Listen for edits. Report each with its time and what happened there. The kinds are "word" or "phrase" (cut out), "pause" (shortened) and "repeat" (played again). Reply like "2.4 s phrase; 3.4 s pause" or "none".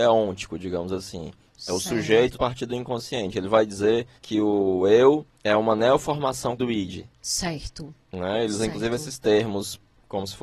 2.3 s word; 4.2 s pause; 5.3 s pause; 6.6 s word